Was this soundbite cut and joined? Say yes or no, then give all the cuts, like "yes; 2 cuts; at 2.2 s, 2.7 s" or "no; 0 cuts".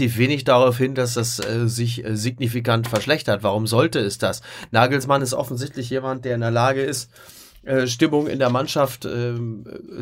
no; 0 cuts